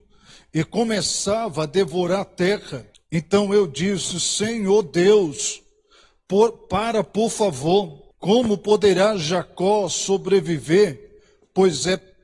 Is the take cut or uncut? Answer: cut